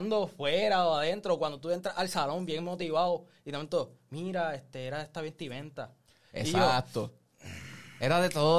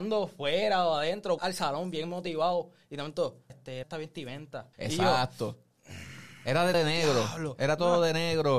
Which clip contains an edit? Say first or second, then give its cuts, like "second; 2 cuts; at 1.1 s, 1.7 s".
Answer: second; 5 cuts; at 1.4 s, 3.5 s, 3.8 s, 4.7 s, 6.7 s